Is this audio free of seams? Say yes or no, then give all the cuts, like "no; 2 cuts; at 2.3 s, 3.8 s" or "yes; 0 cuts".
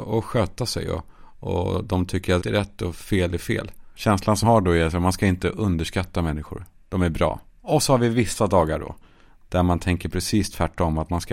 no; 4 cuts; at 2.4 s, 3.9 s, 4.4 s, 7.5 s